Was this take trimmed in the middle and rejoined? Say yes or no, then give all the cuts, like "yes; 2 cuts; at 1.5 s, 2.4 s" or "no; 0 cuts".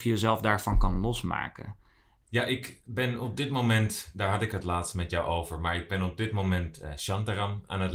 no; 0 cuts